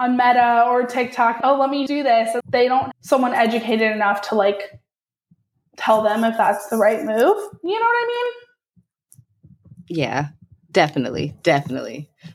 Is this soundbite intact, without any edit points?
no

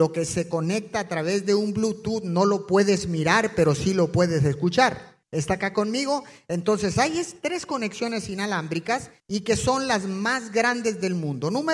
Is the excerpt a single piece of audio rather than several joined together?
no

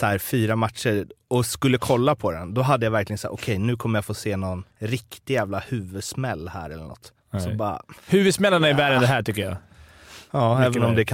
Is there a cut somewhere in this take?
yes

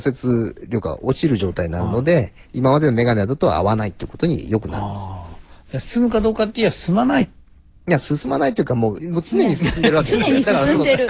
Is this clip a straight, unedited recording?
no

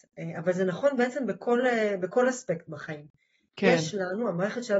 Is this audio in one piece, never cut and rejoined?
yes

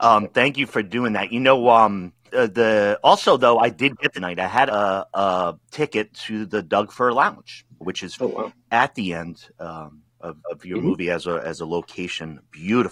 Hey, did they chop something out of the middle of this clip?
yes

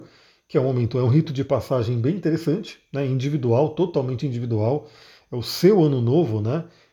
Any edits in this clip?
no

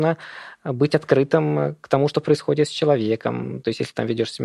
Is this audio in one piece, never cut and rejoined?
yes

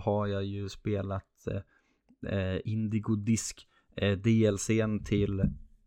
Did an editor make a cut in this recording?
no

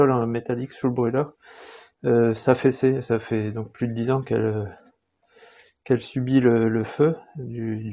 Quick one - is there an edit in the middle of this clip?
no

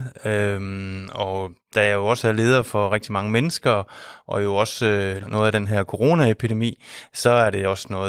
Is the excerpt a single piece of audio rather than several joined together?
no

